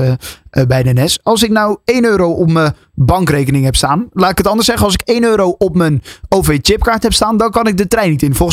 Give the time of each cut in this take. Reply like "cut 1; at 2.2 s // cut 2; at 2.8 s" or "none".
none